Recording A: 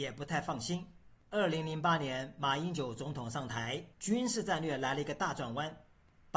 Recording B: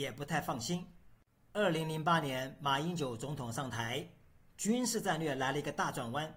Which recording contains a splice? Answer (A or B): A